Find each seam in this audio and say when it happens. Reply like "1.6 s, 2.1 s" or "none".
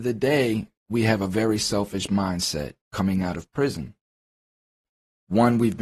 2.8 s